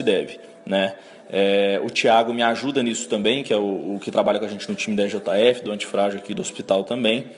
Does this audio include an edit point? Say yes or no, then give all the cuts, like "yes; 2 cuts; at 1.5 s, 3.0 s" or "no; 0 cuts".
no; 0 cuts